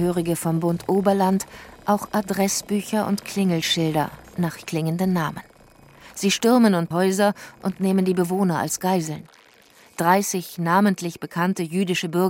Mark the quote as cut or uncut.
cut